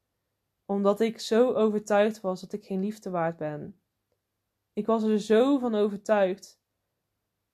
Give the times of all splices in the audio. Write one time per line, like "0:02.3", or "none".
none